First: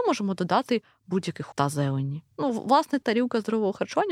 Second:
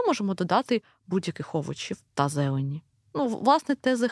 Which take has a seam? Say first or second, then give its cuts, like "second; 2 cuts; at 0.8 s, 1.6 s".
first; 3 cuts; at 1.5 s, 2.3 s, 3.0 s